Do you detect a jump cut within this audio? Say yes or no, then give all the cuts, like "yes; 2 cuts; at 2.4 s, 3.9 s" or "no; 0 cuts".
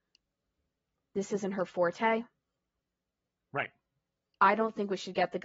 no; 0 cuts